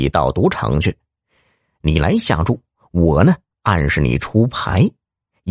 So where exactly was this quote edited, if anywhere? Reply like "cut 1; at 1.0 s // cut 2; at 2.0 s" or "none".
none